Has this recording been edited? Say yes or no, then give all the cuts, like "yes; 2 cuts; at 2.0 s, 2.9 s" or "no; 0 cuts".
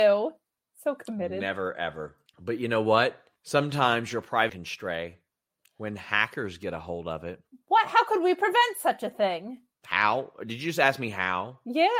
yes; 4 cuts; at 2.3 s, 3.4 s, 4.5 s, 9.7 s